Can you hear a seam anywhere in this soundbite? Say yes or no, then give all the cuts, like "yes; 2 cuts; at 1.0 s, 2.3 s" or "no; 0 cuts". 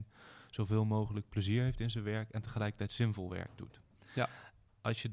no; 0 cuts